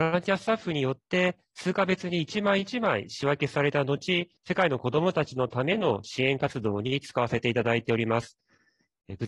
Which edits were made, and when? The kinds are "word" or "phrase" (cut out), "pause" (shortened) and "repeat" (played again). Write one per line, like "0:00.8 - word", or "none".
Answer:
0:04.4 - pause